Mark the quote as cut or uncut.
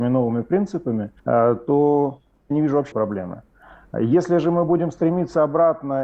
cut